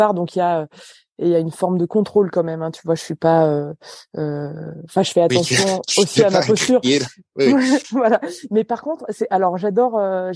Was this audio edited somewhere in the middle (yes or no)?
no